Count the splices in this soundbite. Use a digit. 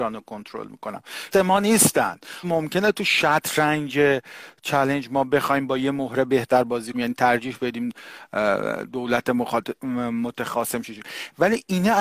3